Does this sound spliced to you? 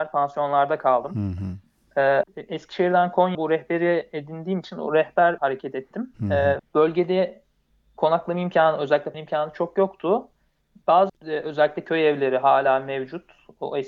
yes; 6 cuts; at 2.2 s, 3.3 s, 5.4 s, 6.6 s, 9.1 s, 11.1 s

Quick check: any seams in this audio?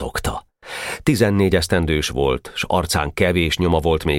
no; 0 cuts

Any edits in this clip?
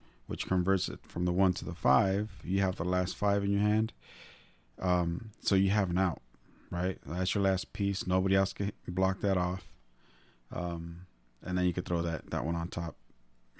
no; 0 cuts

